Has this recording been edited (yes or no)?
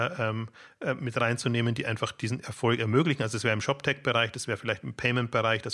no